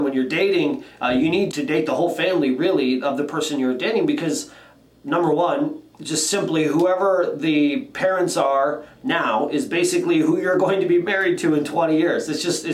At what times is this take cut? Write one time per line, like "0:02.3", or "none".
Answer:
0:01.5
0:05.9